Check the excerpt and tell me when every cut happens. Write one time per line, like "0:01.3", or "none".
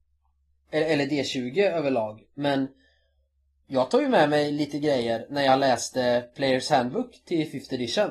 none